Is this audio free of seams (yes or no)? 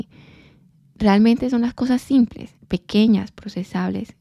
no